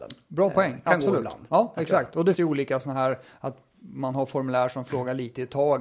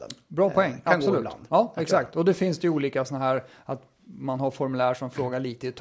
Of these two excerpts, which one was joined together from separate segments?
first; 1 cut; at 2.3 s

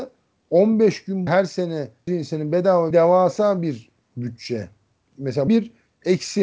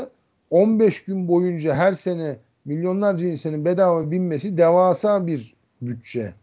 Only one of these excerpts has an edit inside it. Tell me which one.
first; 4 cuts; at 1.3 s, 2.1 s, 2.9 s, 5.5 s

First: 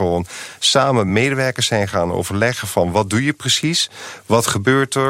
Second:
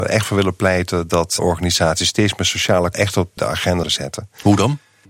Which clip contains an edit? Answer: second; 4 cuts; at 1.4 s, 2.9 s, 3.4 s, 3.8 s

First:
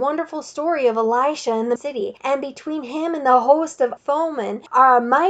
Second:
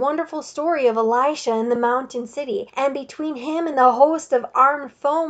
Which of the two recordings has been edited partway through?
first; 2 cuts; at 1.8 s, 4.0 s

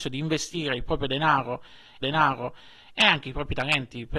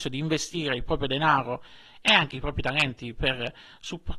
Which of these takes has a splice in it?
first; 1 cut; at 2.0 s

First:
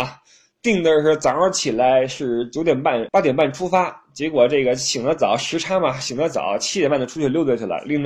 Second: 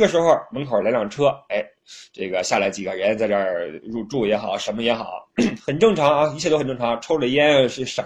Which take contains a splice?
first; 1 cut; at 3.1 s

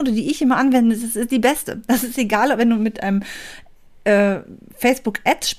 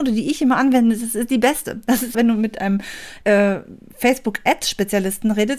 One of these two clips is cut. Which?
second; 2 cuts; at 2.1 s, 3.2 s

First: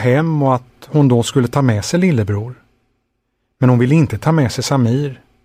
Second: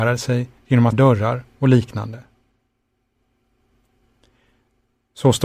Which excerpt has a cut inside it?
second; 1 cut; at 0.9 s

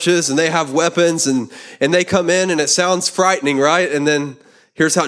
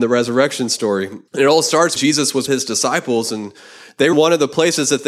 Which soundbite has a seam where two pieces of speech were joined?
second; 4 cuts; at 1.3 s, 2.0 s, 2.5 s, 4.1 s

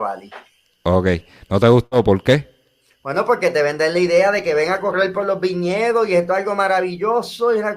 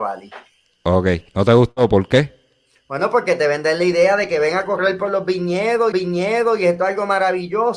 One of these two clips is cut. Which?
second; 2 cuts; at 1.3 s, 5.9 s

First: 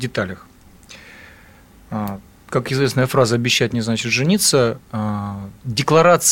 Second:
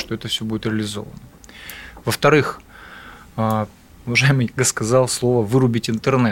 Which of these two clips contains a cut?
second; 1 cut; at 4.6 s

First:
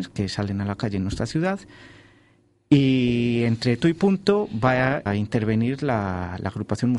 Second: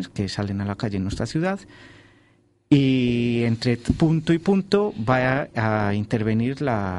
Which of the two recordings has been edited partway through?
first; 2 cuts; at 3.8 s, 5.1 s

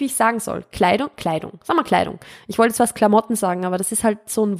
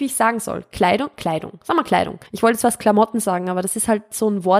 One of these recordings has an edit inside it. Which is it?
second; 1 cut; at 2.3 s

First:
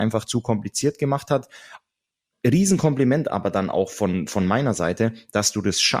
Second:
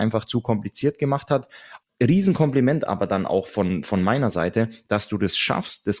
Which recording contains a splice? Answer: second; 1 cut; at 1.8 s

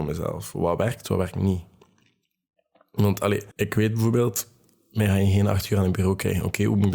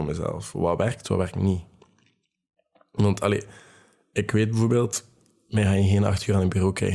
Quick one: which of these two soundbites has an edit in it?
first; 1 cut; at 3.5 s

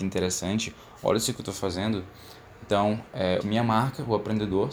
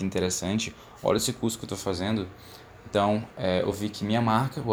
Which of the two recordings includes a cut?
first; 2 cuts; at 1.3 s, 3.4 s

